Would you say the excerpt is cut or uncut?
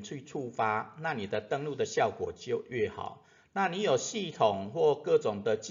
uncut